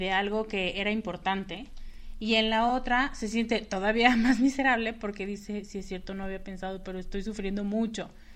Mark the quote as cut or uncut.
uncut